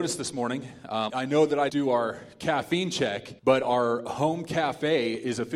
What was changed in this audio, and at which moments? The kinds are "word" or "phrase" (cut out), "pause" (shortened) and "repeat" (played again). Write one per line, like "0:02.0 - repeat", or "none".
0:01.1 - word
0:01.7 - word
0:03.4 - pause